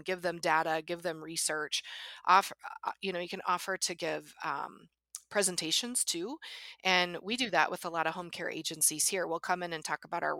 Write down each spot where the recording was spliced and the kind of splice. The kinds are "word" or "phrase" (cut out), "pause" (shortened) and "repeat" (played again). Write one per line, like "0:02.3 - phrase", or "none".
none